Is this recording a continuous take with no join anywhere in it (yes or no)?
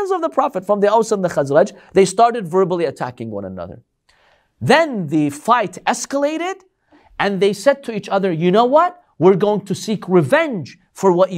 yes